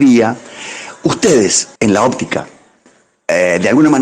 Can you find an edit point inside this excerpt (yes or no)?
yes